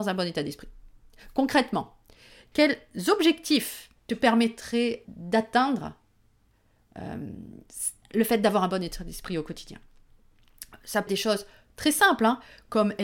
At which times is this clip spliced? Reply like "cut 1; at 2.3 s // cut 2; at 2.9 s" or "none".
cut 1; at 4.0 s // cut 2; at 5.0 s // cut 3; at 11.1 s